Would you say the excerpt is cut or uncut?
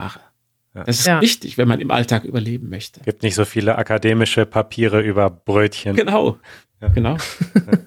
uncut